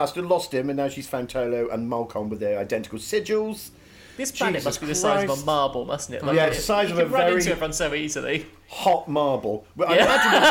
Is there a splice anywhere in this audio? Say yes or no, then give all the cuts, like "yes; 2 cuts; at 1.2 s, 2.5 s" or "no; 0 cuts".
no; 0 cuts